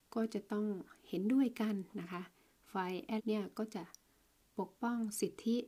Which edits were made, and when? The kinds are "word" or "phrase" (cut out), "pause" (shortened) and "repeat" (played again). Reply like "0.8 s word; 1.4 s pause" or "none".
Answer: 3.2 s word